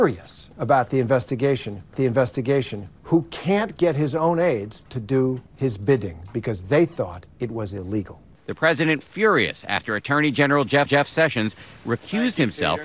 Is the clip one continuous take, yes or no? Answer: no